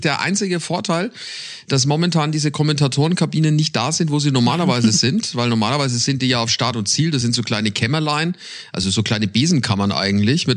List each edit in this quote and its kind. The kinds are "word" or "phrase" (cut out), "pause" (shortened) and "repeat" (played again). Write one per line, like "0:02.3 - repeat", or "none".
none